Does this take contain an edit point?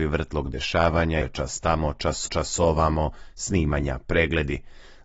yes; 2 cuts; at 1.2 s, 2.3 s

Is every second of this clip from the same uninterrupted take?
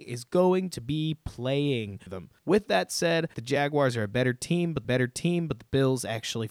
no; 4 cuts; at 2.1 s, 2.4 s, 3.3 s, 4.8 s

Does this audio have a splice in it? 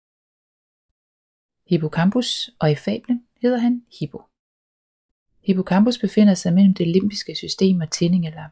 no; 0 cuts

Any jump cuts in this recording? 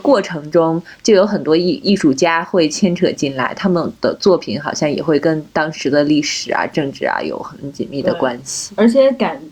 yes; 1 cut; at 4.0 s

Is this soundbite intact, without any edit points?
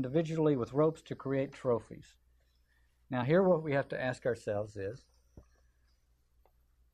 yes; 0 cuts

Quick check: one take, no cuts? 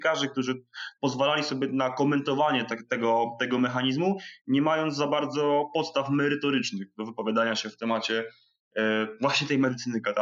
yes; 0 cuts

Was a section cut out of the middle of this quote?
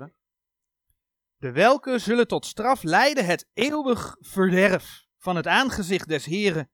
yes; 1 cut; at 5.1 s

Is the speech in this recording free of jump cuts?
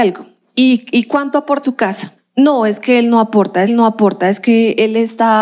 no; 3 cuts; at 1.6 s, 2.2 s, 3.7 s

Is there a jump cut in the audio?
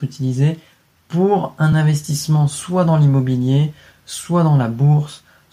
no; 0 cuts

